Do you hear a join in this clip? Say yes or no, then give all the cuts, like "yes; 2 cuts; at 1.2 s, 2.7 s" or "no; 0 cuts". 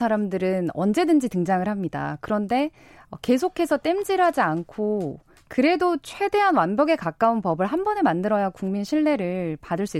no; 0 cuts